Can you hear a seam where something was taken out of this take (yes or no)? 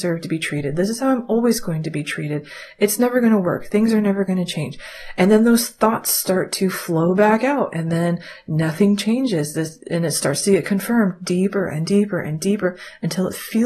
no